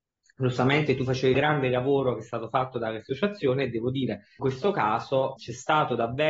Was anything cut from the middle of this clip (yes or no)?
yes